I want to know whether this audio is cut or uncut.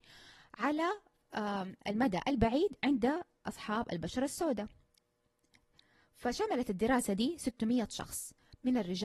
uncut